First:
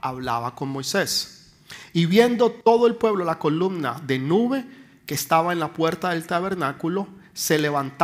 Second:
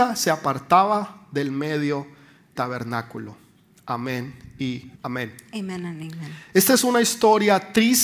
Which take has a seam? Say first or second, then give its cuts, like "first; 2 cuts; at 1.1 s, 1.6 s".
second; 2 cuts; at 2.6 s, 4.9 s